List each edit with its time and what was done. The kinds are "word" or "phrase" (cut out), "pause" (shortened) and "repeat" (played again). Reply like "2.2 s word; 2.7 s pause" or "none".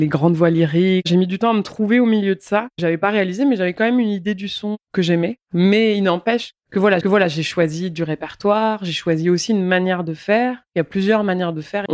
7.0 s repeat